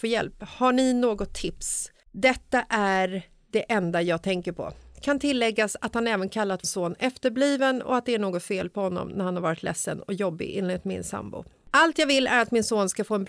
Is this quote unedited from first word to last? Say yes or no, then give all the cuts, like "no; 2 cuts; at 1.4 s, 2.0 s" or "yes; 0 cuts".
no; 2 cuts; at 2.0 s, 6.6 s